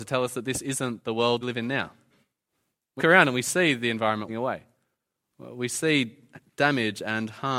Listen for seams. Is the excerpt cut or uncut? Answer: cut